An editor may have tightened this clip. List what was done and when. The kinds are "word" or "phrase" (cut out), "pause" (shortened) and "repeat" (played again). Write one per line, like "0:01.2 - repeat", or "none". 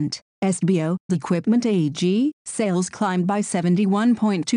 0:01.1 - phrase
0:02.4 - word